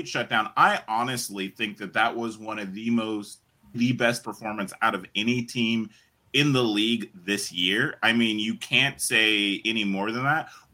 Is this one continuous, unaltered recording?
no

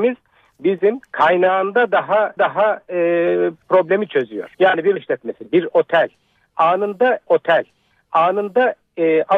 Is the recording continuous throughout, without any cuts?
no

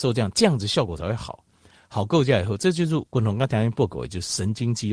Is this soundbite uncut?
yes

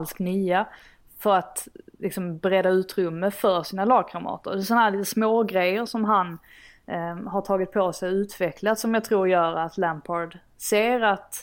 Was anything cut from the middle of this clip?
no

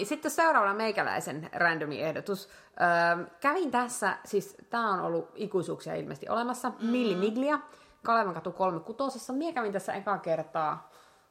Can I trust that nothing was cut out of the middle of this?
yes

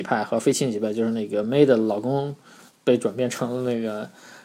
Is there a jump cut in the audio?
no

